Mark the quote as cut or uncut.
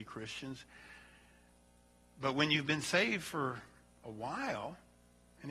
uncut